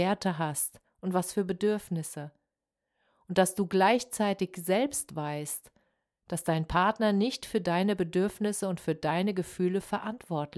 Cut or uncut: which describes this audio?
uncut